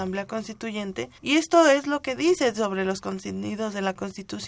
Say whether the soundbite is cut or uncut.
cut